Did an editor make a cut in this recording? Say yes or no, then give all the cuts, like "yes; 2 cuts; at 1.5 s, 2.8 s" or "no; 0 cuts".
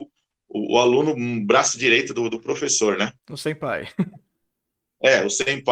no; 0 cuts